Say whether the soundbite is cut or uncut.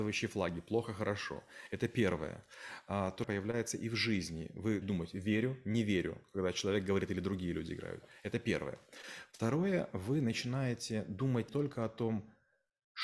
cut